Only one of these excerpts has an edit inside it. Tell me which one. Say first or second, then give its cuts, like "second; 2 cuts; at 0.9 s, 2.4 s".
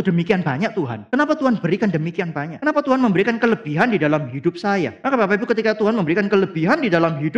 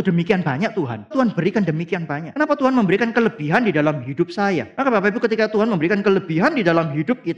second; 1 cut; at 1.1 s